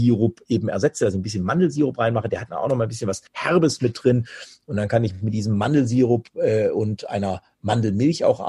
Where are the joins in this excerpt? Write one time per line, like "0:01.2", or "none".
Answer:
0:03.3